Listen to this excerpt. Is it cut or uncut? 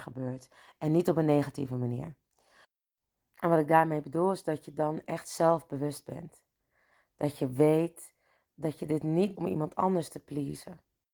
cut